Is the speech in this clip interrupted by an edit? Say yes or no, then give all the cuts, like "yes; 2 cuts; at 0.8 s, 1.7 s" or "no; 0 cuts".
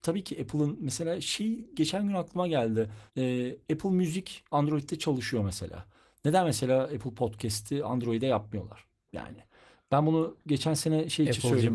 yes; 1 cut; at 3.1 s